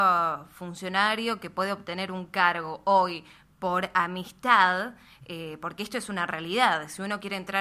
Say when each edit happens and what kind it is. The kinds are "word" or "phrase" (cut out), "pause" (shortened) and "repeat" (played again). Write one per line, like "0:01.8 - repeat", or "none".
none